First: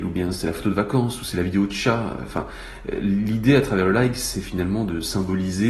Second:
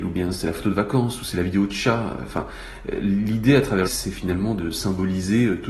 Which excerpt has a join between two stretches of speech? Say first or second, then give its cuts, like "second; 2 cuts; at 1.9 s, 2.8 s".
second; 1 cut; at 3.8 s